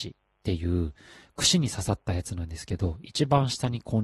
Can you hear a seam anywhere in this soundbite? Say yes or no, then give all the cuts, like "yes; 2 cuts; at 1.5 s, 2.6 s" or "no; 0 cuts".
no; 0 cuts